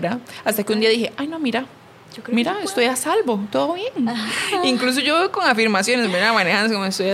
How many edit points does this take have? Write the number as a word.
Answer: zero